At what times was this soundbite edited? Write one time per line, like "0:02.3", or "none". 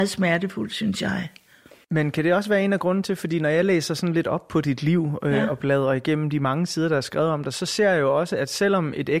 none